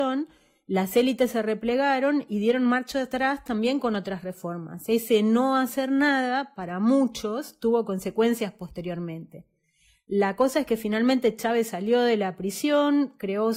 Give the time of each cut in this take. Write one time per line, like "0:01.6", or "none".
none